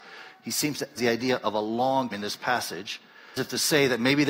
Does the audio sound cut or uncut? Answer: cut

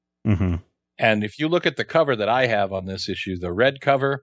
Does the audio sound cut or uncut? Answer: uncut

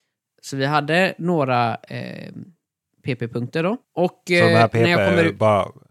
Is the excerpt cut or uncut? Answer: cut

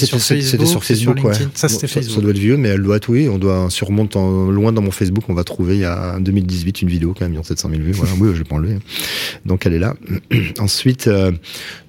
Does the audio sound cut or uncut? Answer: uncut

